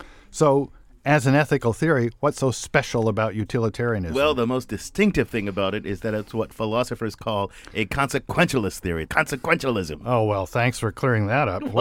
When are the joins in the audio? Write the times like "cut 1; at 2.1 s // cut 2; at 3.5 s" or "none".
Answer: cut 1; at 9.1 s